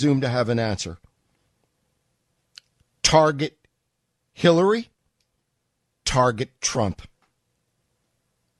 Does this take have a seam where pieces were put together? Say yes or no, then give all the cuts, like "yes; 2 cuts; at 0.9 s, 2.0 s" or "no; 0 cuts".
yes; 1 cut; at 6.0 s